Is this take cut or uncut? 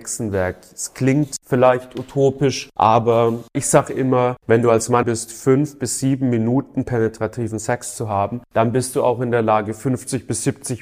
cut